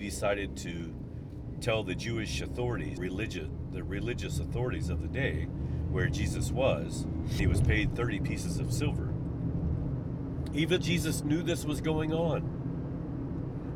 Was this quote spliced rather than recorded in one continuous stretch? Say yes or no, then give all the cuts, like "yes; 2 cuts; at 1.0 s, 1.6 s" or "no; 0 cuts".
yes; 3 cuts; at 3.0 s, 7.4 s, 10.8 s